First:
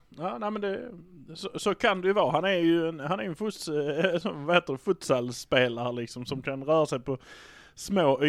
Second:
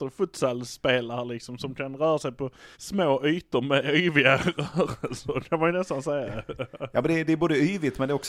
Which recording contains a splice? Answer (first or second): second